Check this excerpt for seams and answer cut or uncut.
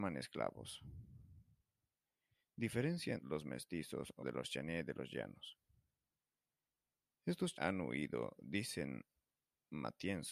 cut